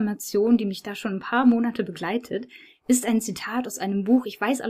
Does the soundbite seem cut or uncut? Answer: uncut